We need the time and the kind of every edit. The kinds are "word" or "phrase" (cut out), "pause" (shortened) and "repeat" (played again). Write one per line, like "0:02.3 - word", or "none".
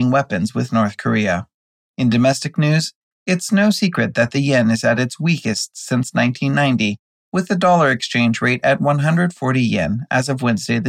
none